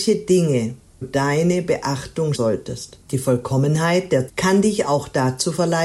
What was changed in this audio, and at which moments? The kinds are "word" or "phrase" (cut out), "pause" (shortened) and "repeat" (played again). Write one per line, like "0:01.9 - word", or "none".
0:01.0 - word
0:02.3 - word
0:03.0 - pause
0:04.3 - word